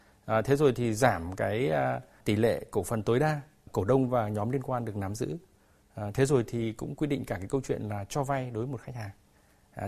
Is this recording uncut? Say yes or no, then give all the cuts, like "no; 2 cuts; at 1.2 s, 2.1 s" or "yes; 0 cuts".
yes; 0 cuts